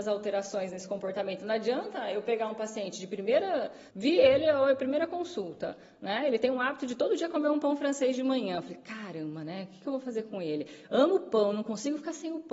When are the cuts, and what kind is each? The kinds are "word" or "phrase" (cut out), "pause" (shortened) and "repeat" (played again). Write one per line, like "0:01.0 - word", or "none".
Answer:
0:03.9 - pause